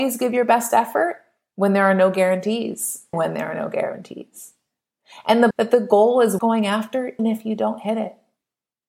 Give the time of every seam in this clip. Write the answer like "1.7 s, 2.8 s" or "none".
3.1 s, 5.5 s, 6.4 s, 7.2 s